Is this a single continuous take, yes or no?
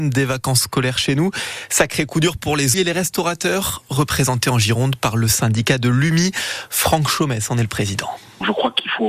no